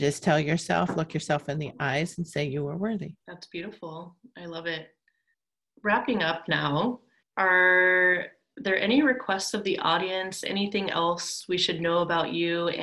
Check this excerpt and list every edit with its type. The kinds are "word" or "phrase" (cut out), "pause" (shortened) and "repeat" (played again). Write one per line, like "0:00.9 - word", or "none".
0:03.2 - pause
0:05.3 - pause
0:07.2 - pause